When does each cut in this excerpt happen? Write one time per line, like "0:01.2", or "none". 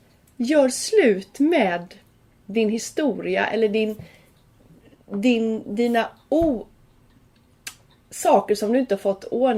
none